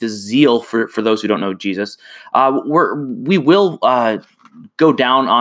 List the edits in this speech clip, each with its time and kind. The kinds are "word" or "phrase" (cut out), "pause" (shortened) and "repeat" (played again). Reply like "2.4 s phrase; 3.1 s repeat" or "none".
none

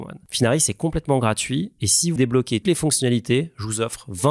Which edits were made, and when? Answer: 2.2 s word; 2.6 s word

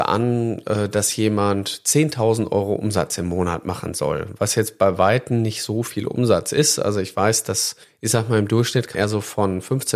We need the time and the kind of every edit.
7.8 s pause; 8.9 s word

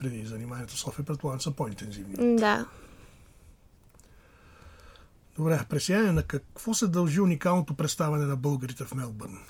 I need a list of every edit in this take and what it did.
none

